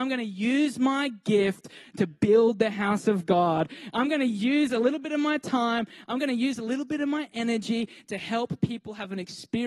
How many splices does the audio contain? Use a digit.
0